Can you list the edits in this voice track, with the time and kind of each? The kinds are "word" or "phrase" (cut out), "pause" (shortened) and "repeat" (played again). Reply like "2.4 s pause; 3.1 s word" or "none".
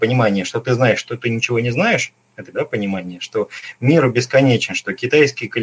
2.5 s word